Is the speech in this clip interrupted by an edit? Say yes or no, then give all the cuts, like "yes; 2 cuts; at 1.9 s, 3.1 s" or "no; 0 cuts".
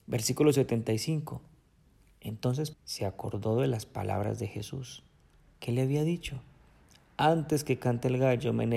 yes; 1 cut; at 2.7 s